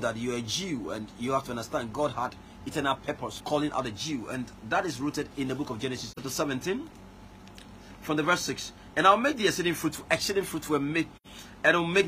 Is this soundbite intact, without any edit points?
no; 2 cuts; at 3.4 s, 6.1 s

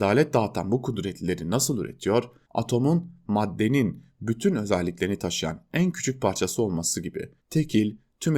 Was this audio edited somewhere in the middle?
yes; 2 cuts; at 2.5 s, 7.4 s

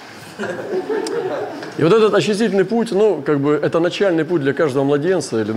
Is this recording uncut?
yes; 0 cuts

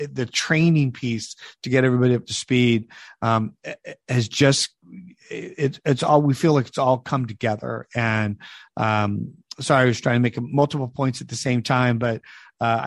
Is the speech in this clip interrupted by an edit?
no; 0 cuts

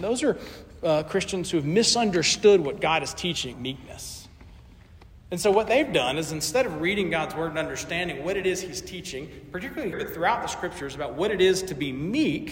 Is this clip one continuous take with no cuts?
no; 2 cuts; at 3.5 s, 9.9 s

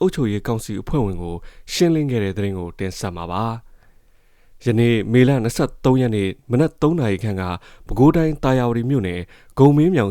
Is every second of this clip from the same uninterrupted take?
yes; 0 cuts

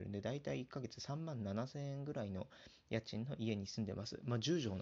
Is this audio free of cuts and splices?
yes; 0 cuts

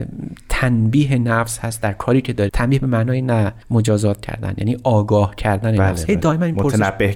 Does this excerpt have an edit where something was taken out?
yes; 2 cuts; at 2.5 s, 3.6 s

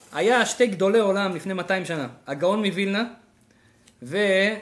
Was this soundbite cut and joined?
no; 0 cuts

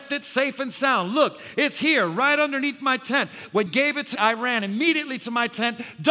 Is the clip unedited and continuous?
no; 2 cuts; at 3.7 s, 4.1 s

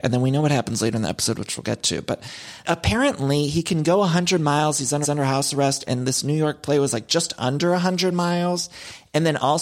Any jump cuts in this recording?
yes; 1 cut; at 5.0 s

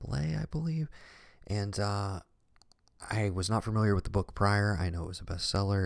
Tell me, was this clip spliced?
no; 0 cuts

